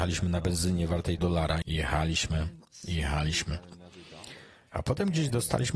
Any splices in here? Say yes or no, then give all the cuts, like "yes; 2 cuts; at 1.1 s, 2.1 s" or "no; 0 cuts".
yes; 2 cuts; at 1.2 s, 1.6 s